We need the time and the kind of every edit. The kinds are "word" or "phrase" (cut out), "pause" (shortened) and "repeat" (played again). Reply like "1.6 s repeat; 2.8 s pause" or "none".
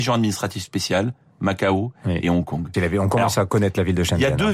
2.7 s phrase